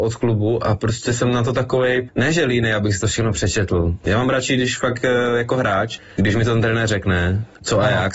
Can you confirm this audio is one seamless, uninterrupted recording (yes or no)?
yes